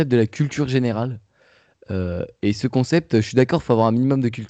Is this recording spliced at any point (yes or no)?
no